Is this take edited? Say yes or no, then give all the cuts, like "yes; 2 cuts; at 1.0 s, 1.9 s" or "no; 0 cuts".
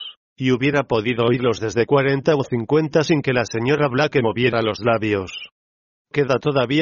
no; 0 cuts